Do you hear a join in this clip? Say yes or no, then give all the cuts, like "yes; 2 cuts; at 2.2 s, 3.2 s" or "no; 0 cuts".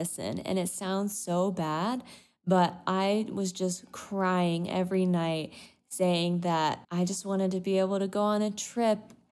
yes; 1 cut; at 6.8 s